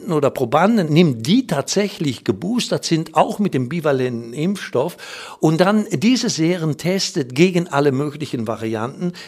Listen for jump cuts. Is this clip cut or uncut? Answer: uncut